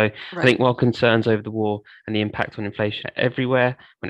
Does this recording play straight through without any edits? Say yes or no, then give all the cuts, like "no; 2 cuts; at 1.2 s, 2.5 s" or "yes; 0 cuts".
no; 1 cut; at 3.0 s